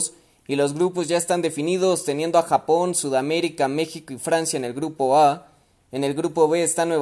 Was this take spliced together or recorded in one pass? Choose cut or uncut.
uncut